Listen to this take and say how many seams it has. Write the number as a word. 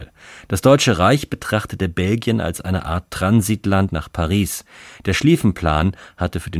one